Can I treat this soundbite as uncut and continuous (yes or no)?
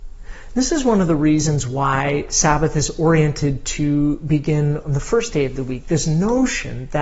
yes